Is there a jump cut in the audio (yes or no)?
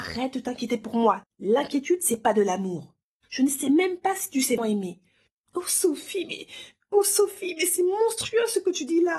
yes